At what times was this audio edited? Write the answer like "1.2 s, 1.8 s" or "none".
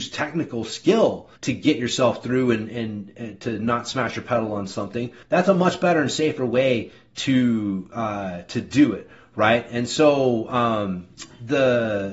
1.4 s, 5.2 s